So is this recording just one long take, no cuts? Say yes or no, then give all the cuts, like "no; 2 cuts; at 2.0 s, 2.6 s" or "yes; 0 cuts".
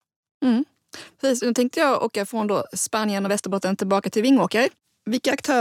yes; 0 cuts